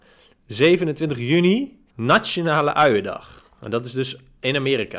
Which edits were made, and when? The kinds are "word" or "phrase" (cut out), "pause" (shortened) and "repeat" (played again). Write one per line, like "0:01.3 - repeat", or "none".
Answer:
0:01.9 - pause